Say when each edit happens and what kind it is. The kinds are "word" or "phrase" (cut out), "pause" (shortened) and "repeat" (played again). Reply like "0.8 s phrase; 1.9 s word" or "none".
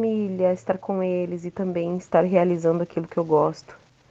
none